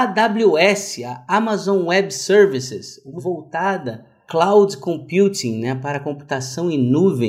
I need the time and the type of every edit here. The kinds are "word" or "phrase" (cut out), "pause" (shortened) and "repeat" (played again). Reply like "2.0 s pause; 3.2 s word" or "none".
3.2 s word; 4.3 s word